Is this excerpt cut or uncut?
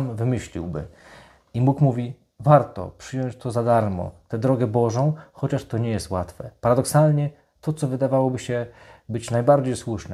uncut